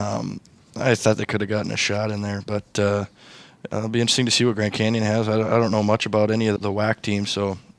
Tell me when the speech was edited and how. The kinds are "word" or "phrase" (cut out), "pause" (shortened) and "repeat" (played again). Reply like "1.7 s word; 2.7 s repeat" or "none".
6.6 s word